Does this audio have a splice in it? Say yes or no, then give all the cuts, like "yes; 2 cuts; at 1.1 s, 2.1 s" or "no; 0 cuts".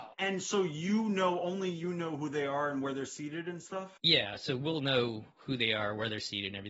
no; 0 cuts